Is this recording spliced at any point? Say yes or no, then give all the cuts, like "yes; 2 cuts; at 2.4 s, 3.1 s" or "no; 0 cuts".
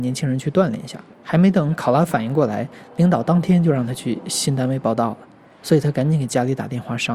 yes; 1 cut; at 1.1 s